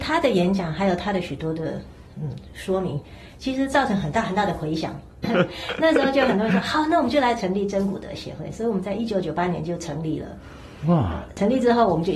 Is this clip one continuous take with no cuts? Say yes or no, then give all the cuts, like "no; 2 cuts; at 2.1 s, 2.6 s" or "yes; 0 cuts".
no; 1 cut; at 5.2 s